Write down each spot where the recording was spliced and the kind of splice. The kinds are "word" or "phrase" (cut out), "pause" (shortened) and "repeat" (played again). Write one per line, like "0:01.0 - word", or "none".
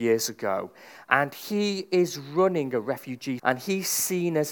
0:03.4 - word